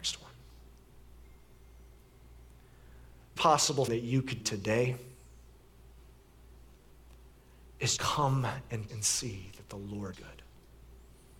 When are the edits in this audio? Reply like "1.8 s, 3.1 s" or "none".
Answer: 3.4 s, 3.9 s, 4.4 s, 8.0 s, 8.9 s, 10.1 s